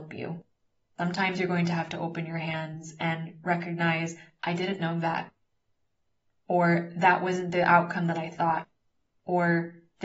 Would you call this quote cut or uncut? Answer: uncut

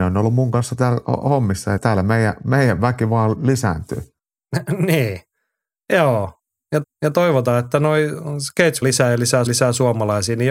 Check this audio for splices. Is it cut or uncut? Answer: cut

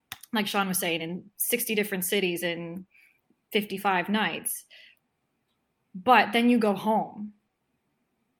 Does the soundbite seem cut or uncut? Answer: uncut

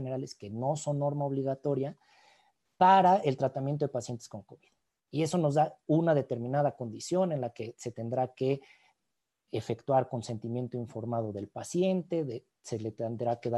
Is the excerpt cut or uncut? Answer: uncut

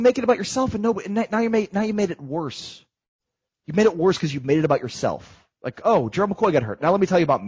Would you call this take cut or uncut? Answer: cut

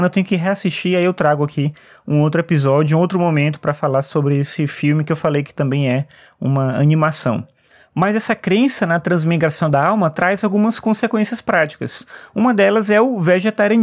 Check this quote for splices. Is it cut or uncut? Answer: uncut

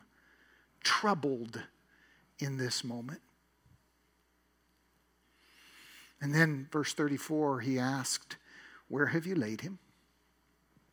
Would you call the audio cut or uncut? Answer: uncut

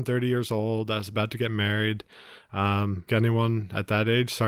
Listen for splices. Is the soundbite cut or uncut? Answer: cut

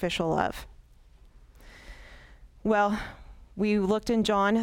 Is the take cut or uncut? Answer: cut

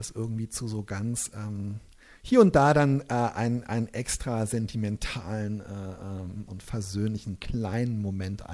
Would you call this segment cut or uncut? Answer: cut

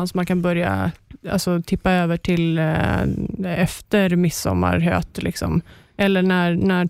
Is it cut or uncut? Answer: uncut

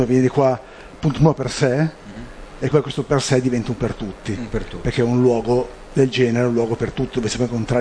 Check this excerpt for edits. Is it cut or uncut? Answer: cut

